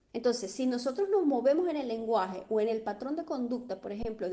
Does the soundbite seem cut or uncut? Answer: uncut